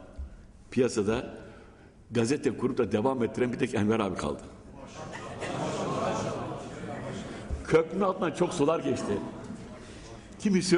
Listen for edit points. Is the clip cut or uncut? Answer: uncut